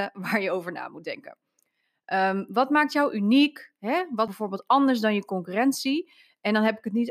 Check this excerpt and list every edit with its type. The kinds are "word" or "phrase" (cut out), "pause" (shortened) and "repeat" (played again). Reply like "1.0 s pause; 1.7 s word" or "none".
4.3 s phrase

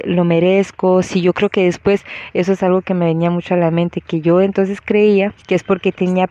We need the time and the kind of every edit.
5.4 s pause

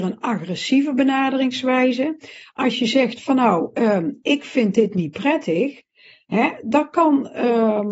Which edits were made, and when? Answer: none

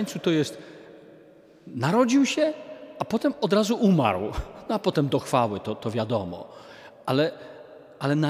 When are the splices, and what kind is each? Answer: none

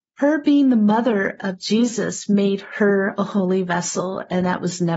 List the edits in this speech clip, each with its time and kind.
none

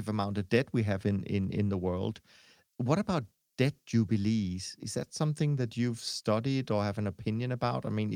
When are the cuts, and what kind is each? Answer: none

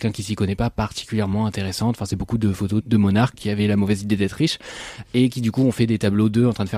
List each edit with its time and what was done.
2.8 s word; 3.3 s word

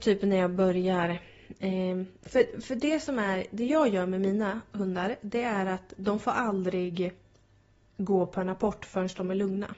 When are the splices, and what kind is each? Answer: none

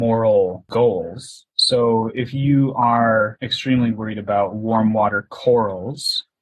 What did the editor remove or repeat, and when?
1.5 s pause

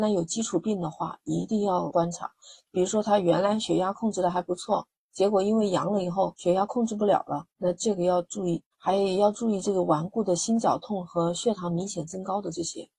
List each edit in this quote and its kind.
7.5 s pause; 8.7 s pause

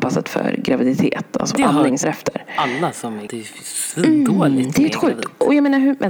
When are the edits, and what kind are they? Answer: 1.5 s word; 2.0 s word; 3.3 s word

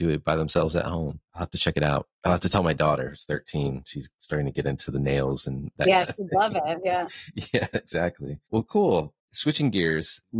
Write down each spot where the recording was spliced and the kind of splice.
none

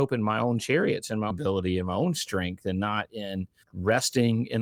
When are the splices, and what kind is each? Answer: 1.3 s word

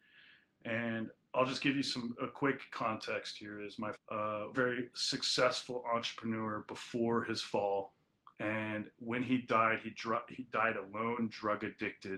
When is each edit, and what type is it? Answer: 3.9 s word; 4.5 s word; 8.3 s pause

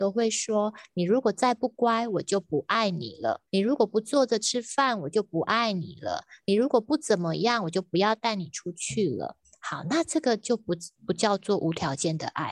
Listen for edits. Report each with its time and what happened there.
3.5 s pause

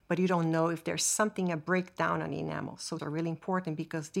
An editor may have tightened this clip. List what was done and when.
3.0 s word

